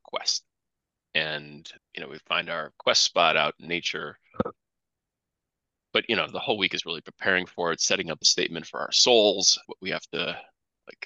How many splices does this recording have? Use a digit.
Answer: 3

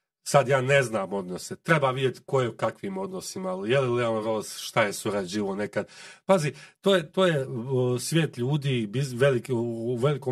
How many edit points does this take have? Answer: 0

